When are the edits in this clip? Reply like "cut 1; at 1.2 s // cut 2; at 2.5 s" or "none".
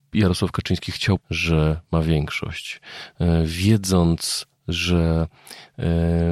cut 1; at 1.2 s